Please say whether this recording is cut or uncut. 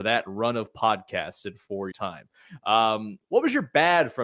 cut